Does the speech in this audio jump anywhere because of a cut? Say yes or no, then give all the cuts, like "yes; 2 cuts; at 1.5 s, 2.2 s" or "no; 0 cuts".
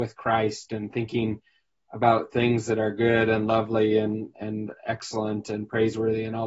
no; 0 cuts